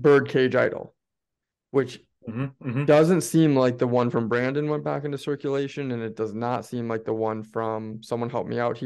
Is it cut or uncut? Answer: uncut